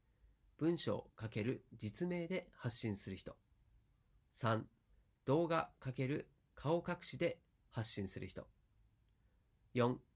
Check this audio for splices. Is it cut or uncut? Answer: uncut